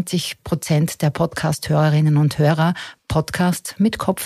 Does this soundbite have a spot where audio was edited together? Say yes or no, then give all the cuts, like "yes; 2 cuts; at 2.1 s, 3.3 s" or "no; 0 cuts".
no; 0 cuts